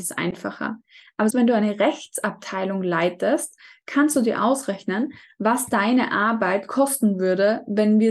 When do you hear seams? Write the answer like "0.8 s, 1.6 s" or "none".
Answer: 1.3 s